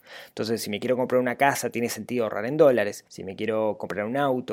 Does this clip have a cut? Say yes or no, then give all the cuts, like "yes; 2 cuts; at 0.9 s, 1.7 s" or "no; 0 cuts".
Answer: yes; 1 cut; at 3.1 s